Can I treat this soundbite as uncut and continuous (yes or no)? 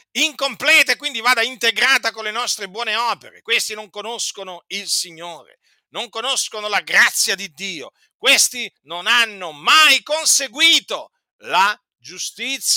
yes